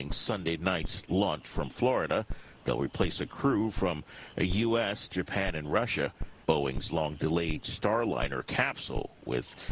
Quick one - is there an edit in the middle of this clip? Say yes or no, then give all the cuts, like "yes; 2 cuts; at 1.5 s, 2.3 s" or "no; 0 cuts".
yes; 2 cuts; at 5.1 s, 6.4 s